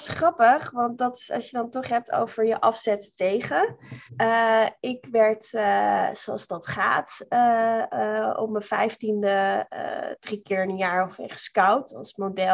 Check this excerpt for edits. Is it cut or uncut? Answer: cut